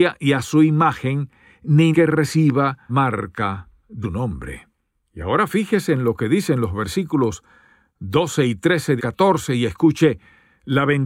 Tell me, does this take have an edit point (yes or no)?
yes